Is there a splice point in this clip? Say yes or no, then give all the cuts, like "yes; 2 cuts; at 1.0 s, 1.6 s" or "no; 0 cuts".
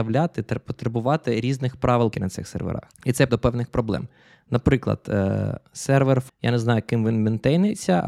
yes; 4 cuts; at 2.1 s, 2.9 s, 3.3 s, 6.3 s